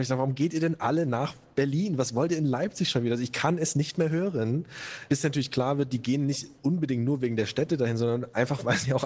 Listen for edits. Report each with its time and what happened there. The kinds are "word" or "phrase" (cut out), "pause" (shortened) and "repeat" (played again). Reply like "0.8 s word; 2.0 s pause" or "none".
none

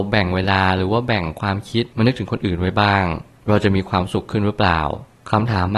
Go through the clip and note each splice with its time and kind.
1.9 s pause

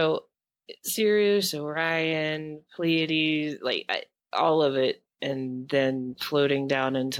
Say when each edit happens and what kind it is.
none

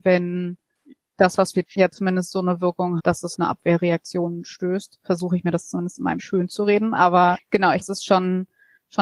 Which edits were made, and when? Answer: 1.7 s word; 3.0 s word; 3.3 s word; 6.2 s word; 7.8 s word

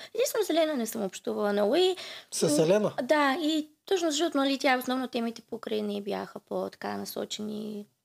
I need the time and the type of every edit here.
none

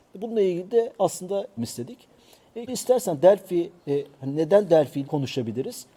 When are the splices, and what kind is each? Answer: 1.6 s phrase; 2.7 s word; 3.8 s pause; 5.0 s word

